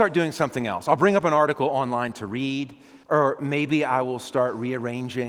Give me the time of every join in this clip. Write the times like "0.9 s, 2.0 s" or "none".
3.0 s